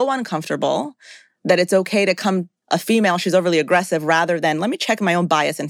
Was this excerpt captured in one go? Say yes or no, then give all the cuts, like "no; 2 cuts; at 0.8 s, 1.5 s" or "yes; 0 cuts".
no; 1 cut; at 2.6 s